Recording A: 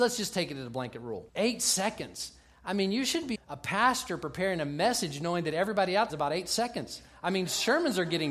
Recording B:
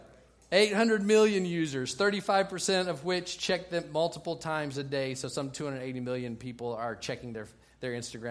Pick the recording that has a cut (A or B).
A